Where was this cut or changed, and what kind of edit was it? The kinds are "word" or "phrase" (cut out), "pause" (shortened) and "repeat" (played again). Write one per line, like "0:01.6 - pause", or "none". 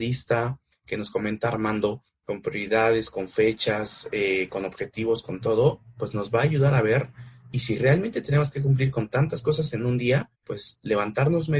0:10.3 - pause

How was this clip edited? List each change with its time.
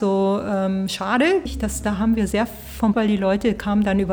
0:01.5 - word
0:02.9 - word

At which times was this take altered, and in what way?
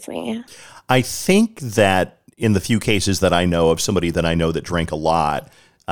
none

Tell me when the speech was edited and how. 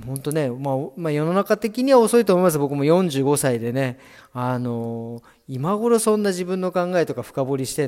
none

